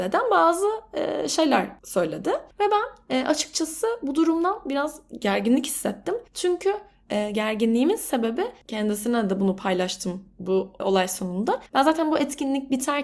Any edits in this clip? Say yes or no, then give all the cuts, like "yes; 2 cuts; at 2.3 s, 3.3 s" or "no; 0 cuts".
yes; 3 cuts; at 6.3 s, 10.8 s, 11.7 s